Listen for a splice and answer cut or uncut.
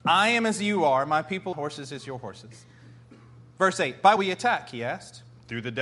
cut